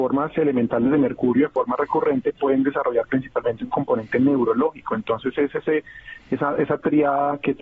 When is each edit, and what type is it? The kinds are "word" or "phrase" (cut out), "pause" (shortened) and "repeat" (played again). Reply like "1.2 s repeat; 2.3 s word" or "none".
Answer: none